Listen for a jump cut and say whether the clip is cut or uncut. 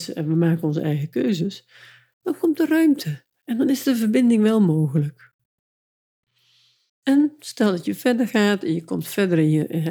uncut